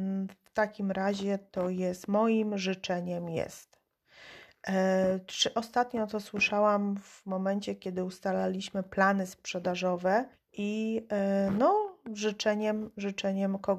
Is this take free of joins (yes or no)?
no